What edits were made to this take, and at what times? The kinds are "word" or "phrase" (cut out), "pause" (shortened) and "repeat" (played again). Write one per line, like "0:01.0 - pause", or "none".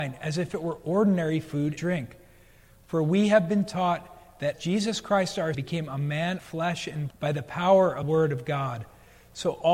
0:01.8 - word
0:04.5 - word
0:05.5 - word
0:06.4 - word
0:07.1 - word
0:08.0 - word